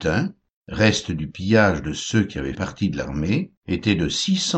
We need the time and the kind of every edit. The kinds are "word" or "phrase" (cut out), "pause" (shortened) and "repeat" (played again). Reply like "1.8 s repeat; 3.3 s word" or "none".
2.5 s word; 3.6 s pause